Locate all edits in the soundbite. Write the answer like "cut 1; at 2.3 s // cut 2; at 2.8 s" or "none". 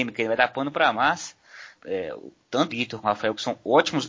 cut 1; at 0.9 s // cut 2; at 1.8 s // cut 3; at 2.7 s // cut 4; at 3.0 s